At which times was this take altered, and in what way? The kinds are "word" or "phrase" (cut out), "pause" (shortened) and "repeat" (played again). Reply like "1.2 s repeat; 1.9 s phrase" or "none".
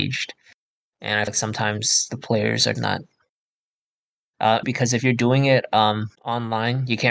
1.3 s word; 2.8 s word; 4.6 s word; 6.1 s pause